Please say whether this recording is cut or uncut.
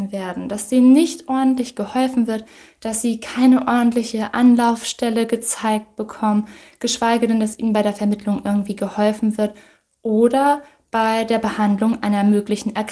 uncut